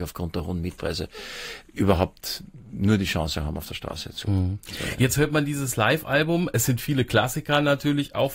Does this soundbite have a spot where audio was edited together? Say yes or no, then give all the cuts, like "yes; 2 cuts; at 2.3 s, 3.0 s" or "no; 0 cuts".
no; 0 cuts